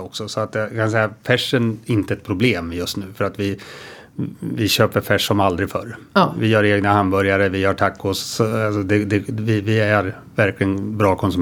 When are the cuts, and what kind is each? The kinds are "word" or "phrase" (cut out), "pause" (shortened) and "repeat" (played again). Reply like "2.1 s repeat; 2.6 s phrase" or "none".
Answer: 1.8 s word